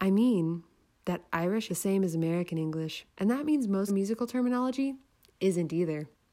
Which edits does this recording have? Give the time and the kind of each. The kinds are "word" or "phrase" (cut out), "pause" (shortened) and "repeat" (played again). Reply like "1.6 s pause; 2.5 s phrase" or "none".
1.7 s phrase; 3.1 s pause; 3.9 s phrase